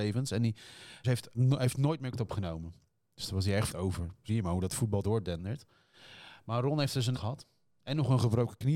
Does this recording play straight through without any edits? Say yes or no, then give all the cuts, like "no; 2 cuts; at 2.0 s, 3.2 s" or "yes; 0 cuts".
no; 7 cuts; at 1.0 s, 1.3 s, 2.1 s, 3.7 s, 4.3 s, 5.0 s, 7.1 s